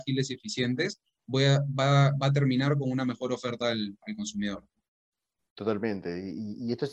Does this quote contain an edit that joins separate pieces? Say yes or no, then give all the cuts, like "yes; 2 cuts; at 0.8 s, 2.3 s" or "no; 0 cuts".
no; 0 cuts